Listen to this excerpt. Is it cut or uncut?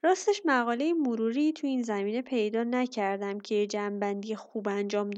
uncut